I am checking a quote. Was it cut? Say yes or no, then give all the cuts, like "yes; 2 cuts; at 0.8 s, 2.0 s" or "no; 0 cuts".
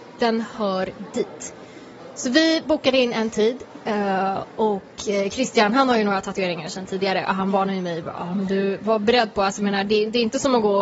no; 0 cuts